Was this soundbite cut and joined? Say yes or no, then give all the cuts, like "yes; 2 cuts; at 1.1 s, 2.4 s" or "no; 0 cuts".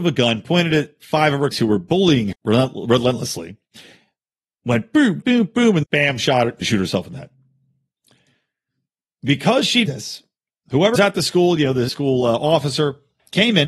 yes; 8 cuts; at 1.5 s, 2.3 s, 5.2 s, 5.8 s, 6.6 s, 9.9 s, 11.0 s, 11.9 s